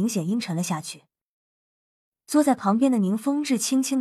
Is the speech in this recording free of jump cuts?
yes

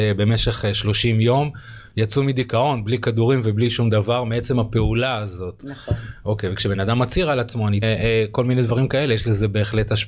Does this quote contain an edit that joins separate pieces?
yes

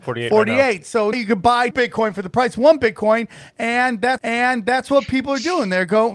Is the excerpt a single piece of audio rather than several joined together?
no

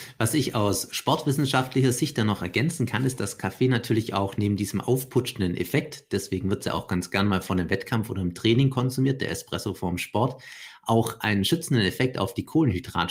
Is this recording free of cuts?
yes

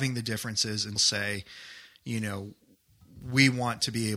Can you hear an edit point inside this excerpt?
yes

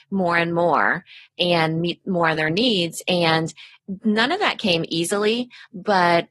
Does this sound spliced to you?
no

